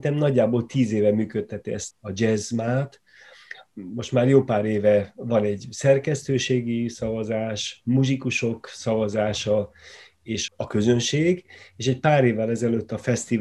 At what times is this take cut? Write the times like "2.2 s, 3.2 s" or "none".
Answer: 1.9 s, 3.7 s, 10.5 s